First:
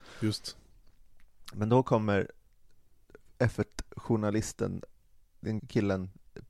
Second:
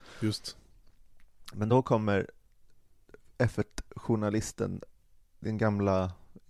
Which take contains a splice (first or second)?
first